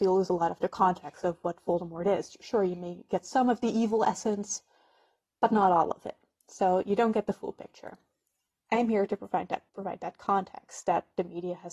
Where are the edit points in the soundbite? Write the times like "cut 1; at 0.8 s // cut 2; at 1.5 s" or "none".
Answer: cut 1; at 9.7 s